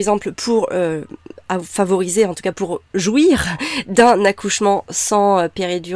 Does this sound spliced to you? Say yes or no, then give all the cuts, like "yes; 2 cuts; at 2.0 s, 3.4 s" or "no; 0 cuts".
no; 0 cuts